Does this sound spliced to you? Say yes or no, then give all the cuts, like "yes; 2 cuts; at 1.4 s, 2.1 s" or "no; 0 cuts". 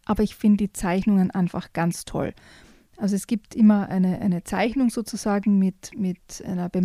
no; 0 cuts